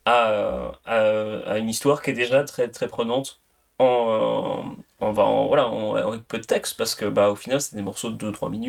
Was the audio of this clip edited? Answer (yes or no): no